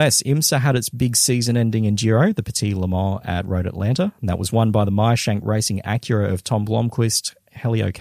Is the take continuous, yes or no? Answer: yes